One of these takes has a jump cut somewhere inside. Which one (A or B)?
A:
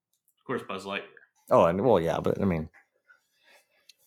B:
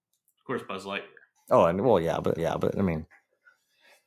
B